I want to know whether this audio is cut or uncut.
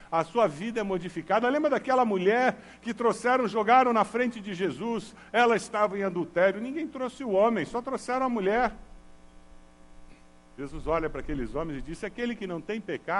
uncut